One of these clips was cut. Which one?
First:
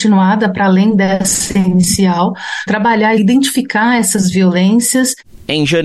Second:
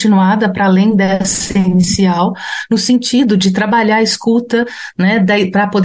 first; 2 cuts; at 2.7 s, 3.2 s

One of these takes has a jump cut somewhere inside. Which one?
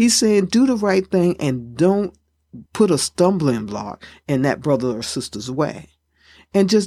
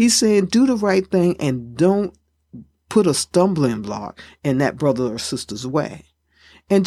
first; 1 cut; at 2.7 s

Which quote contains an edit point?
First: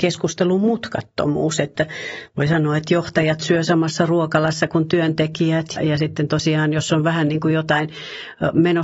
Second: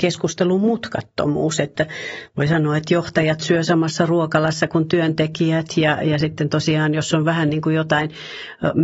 first; 1 cut; at 5.8 s

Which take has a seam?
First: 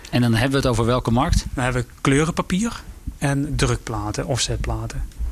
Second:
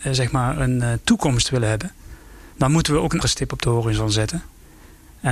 second; 2 cuts; at 2.5 s, 3.2 s

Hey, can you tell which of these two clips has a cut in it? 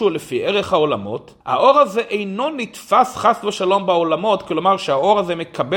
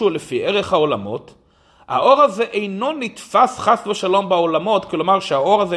first; 1 cut; at 1.4 s

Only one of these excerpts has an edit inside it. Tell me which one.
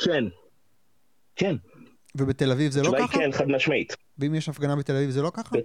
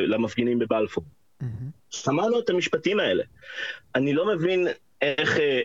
second; 1 cut; at 1.8 s

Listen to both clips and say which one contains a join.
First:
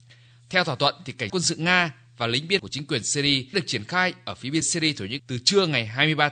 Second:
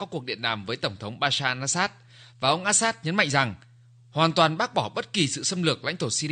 first; 5 cuts; at 1.3 s, 2.6 s, 3.5 s, 4.6 s, 5.2 s

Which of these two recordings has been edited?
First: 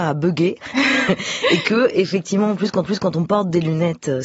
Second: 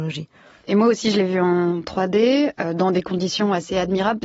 first; 1 cut; at 2.8 s

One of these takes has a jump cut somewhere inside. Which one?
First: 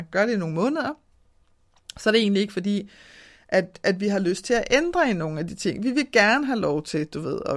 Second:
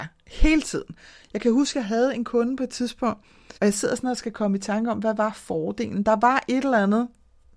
second; 1 cut; at 3.6 s

